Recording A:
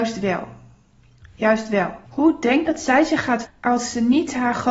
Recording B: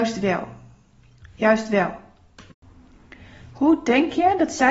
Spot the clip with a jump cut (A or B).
A